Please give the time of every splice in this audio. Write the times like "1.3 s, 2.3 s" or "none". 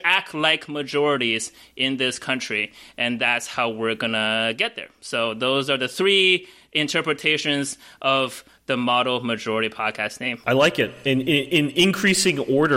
none